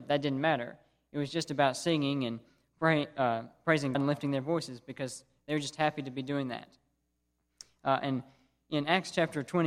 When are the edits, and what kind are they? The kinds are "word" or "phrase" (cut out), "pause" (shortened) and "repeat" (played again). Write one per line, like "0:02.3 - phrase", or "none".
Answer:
0:03.9 - word